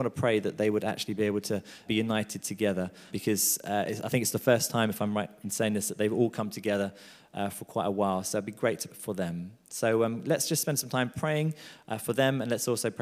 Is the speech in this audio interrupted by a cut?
yes; 3 cuts; at 1.9 s, 3.1 s, 8.9 s

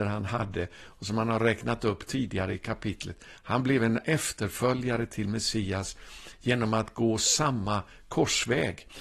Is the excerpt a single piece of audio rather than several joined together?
yes; 0 cuts

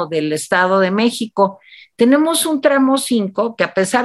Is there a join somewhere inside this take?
no; 0 cuts

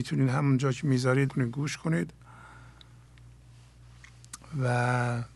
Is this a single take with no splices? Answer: no; 1 cut; at 1.3 s

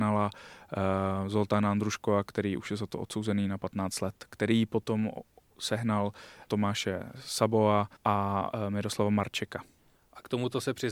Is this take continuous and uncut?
no; 1 cut; at 8.0 s

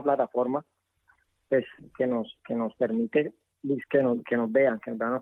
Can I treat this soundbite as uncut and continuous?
yes; 0 cuts

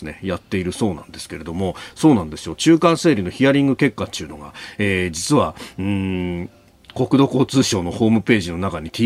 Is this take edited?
no; 0 cuts

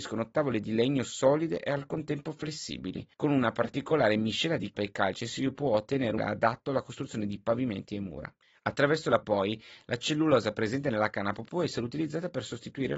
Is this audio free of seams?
no; 5 cuts; at 3.1 s, 4.7 s, 6.2 s, 8.4 s, 9.2 s

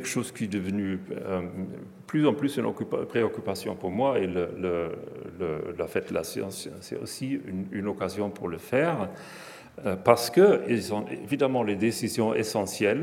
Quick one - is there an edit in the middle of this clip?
no; 0 cuts

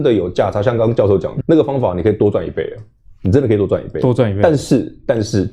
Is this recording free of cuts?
no; 1 cut; at 1.4 s

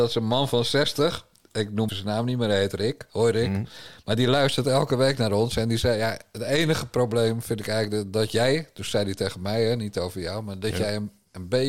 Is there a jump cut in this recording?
yes; 1 cut; at 1.9 s

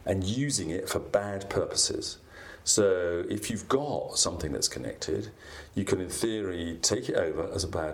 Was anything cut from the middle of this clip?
no; 0 cuts

